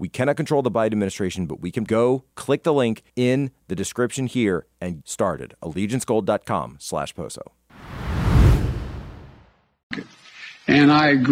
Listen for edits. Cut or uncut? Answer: cut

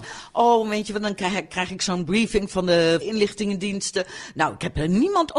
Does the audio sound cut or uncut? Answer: cut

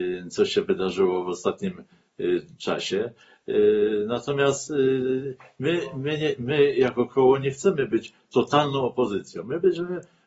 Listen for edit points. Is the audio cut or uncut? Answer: uncut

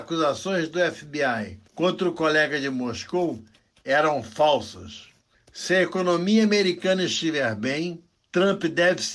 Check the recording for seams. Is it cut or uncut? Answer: uncut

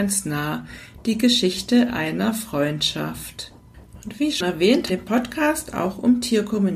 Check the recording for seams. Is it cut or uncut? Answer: cut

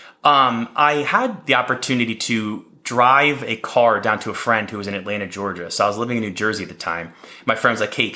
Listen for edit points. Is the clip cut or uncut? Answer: uncut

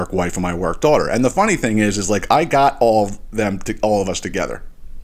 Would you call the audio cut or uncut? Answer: uncut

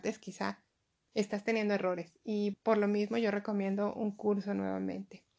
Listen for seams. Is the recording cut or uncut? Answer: cut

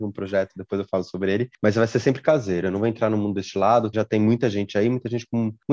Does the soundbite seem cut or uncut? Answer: cut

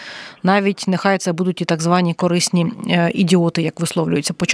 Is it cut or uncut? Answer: uncut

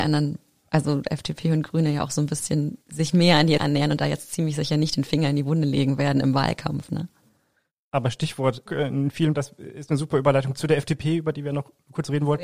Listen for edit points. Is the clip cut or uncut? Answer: cut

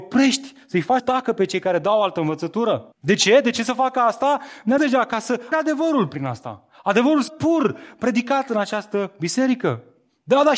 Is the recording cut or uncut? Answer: cut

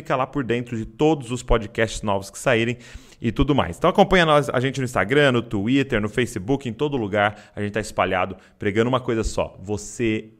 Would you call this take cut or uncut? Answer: uncut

